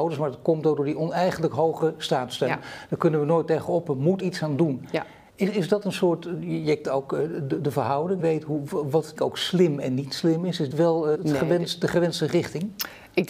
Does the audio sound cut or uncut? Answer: cut